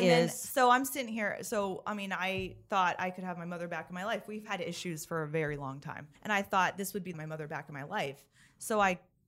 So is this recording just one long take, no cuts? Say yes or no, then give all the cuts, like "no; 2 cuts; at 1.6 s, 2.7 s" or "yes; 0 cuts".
no; 2 cuts; at 6.1 s, 7.1 s